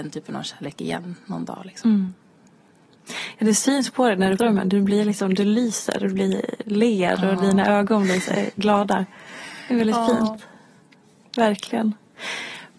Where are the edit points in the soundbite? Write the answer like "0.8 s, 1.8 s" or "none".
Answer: 4.4 s